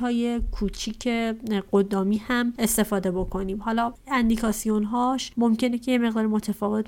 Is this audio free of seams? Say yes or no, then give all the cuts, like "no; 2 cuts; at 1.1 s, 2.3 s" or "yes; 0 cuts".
yes; 0 cuts